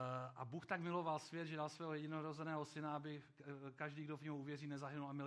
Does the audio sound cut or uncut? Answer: uncut